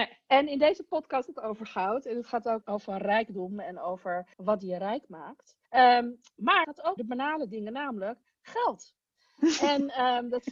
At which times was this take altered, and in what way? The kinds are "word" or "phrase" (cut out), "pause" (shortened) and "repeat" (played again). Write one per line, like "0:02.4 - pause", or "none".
0:01.3 - word
0:02.6 - word
0:04.3 - pause
0:05.6 - pause
0:06.6 - word
0:07.0 - word